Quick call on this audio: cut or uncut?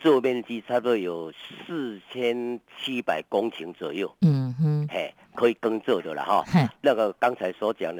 cut